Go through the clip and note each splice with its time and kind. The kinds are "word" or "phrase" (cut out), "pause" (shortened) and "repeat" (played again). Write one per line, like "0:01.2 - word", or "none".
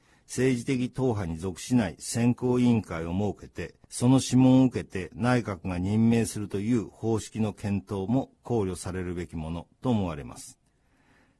0:03.8 - pause